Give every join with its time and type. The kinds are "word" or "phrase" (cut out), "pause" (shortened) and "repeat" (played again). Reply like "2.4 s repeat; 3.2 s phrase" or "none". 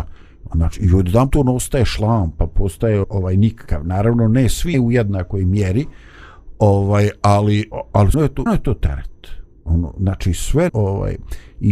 1.3 s word; 3.0 s word; 4.7 s word; 7.7 s word; 8.1 s word; 8.5 s word; 10.7 s word